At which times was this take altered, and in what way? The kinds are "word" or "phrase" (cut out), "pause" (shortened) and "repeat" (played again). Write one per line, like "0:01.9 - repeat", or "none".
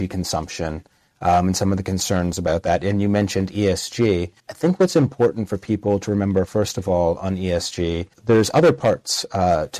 0:04.4 - pause
0:08.1 - pause